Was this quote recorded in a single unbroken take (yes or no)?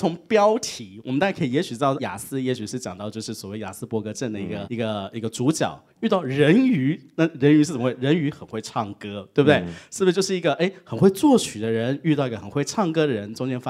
no